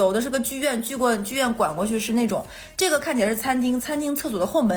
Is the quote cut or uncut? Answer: uncut